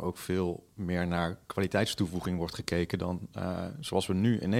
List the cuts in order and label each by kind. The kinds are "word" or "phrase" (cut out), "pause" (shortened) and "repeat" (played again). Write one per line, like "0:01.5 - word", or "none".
none